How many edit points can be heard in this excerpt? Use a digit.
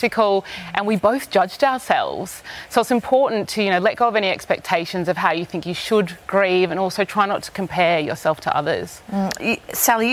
0